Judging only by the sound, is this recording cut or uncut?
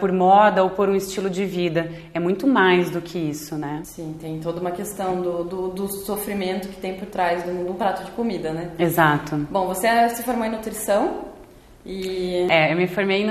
uncut